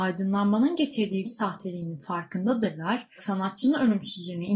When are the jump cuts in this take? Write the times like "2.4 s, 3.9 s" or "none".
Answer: 1.2 s, 3.2 s